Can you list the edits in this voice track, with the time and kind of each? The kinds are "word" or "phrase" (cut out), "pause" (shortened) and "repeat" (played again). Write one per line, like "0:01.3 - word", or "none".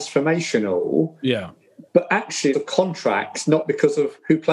0:01.9 - pause
0:02.5 - phrase